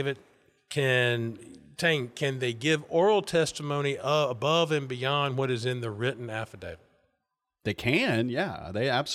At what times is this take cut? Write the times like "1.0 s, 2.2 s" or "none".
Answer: none